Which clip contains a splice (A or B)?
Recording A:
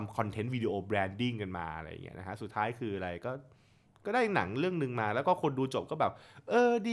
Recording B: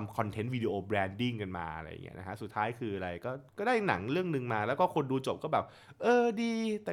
B